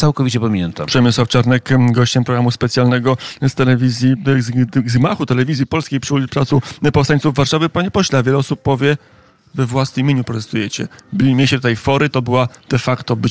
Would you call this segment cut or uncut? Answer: uncut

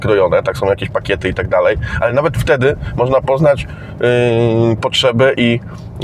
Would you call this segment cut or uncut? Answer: uncut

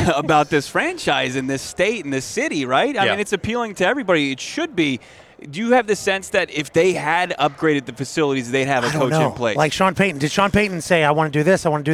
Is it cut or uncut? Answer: uncut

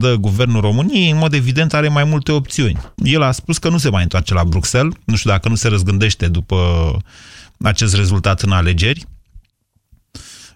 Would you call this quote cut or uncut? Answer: cut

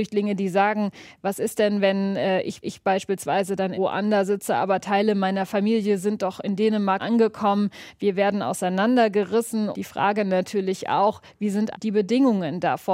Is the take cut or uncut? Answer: cut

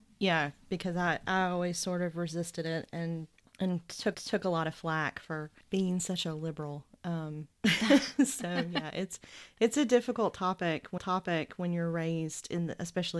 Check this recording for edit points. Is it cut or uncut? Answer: cut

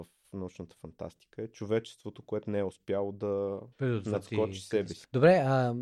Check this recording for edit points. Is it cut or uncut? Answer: cut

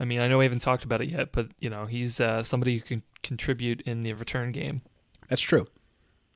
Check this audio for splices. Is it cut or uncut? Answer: uncut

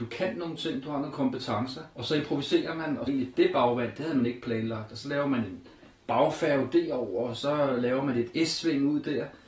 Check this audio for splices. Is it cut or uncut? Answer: cut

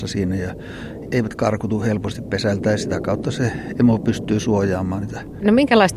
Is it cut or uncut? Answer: uncut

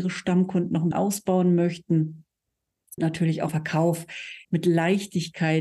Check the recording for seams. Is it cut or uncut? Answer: cut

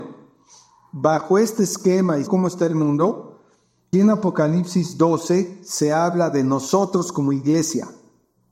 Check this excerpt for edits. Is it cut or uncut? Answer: cut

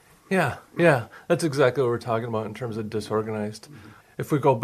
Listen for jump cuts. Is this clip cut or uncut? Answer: uncut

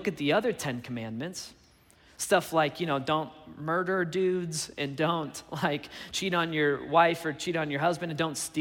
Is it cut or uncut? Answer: uncut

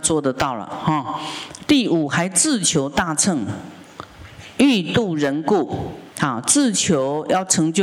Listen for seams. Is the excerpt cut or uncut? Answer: cut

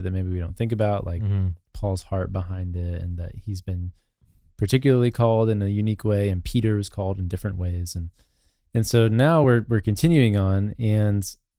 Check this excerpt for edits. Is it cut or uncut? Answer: uncut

